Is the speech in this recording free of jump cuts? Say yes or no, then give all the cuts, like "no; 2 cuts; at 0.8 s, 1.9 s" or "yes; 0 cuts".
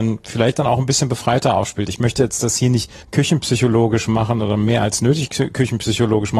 no; 1 cut; at 3.0 s